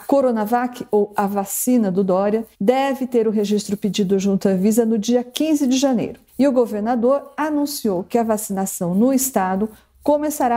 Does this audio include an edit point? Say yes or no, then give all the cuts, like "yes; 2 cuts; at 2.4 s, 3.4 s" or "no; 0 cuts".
yes; 2 cuts; at 2.5 s, 6.3 s